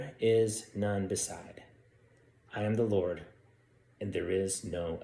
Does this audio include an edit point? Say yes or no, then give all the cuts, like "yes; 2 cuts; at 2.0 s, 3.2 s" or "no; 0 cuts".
no; 0 cuts